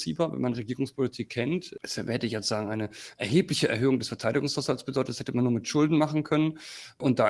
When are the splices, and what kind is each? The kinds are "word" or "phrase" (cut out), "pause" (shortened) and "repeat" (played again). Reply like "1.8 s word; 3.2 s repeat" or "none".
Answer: none